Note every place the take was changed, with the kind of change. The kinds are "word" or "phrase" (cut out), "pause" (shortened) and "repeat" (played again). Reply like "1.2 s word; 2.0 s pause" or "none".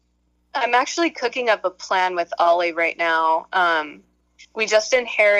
none